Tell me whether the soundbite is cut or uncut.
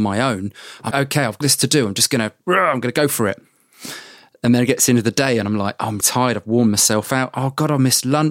cut